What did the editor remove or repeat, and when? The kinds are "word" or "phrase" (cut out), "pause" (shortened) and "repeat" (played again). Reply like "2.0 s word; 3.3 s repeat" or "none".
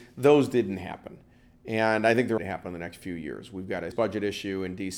2.4 s word; 3.9 s word